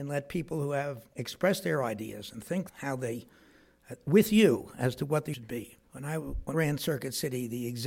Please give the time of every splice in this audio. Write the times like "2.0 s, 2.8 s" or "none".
1.1 s, 2.7 s, 5.3 s, 5.9 s, 6.5 s